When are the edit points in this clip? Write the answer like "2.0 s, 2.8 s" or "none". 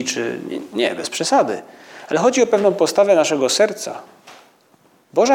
none

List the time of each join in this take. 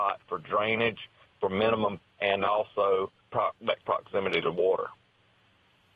1.3 s, 2.0 s, 3.2 s, 3.8 s

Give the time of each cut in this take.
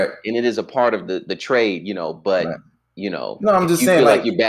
none

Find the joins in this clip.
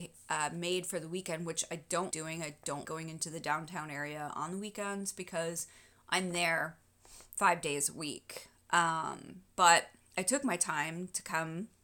2.1 s, 2.8 s

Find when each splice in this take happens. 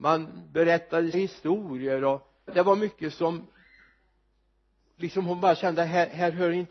1.1 s, 2.5 s

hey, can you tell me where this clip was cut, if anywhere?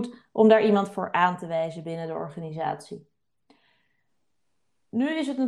none

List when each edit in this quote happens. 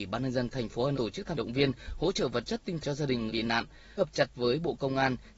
0.9 s, 1.3 s, 2.8 s, 3.3 s, 4.0 s, 4.3 s

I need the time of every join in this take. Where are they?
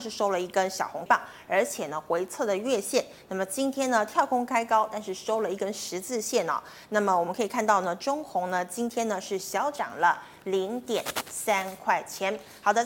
1.1 s

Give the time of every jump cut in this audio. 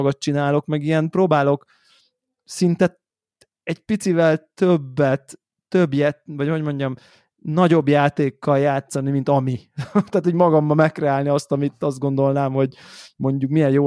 none

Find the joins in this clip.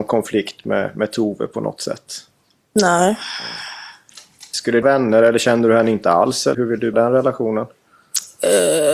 4.8 s, 6.5 s, 6.9 s

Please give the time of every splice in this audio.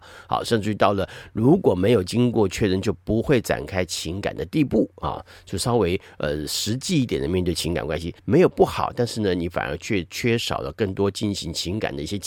8.2 s

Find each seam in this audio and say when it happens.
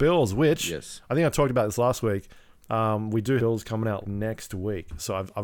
3.4 s, 4.0 s

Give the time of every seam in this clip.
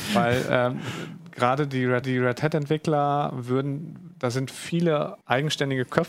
2.0 s, 5.2 s

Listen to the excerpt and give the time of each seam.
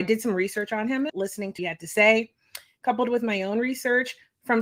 1.1 s, 1.6 s

